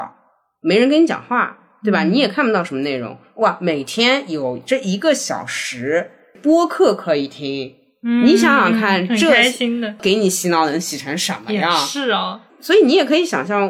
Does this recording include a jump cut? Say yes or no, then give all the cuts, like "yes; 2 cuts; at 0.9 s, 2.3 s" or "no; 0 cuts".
no; 0 cuts